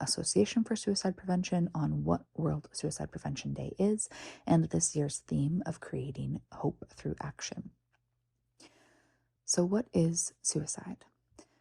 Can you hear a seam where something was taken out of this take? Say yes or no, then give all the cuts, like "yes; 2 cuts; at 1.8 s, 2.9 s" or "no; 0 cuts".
no; 0 cuts